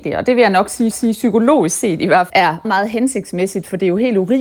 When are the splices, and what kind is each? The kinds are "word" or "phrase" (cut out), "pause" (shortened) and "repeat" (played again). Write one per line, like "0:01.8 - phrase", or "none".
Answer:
0:00.9 - repeat
0:02.3 - word
0:02.6 - word